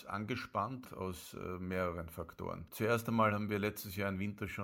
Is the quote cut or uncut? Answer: uncut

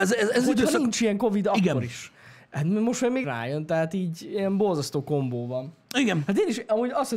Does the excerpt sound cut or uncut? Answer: cut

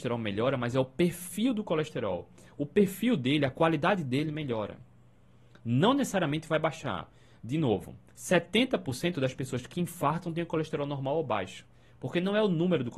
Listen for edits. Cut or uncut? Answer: uncut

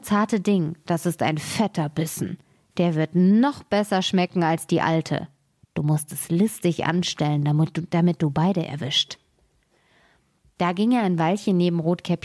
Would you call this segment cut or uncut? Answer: uncut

